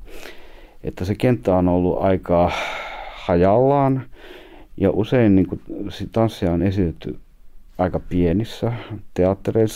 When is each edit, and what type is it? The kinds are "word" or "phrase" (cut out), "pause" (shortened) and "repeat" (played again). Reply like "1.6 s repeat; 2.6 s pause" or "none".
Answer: none